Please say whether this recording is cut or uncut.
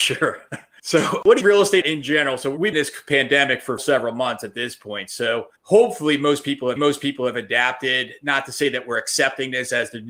cut